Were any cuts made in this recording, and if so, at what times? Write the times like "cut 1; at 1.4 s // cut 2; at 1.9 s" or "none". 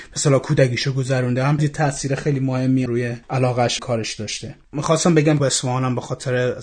cut 1; at 1.6 s // cut 2; at 2.9 s // cut 3; at 3.2 s // cut 4; at 3.8 s // cut 5; at 4.6 s // cut 6; at 5.4 s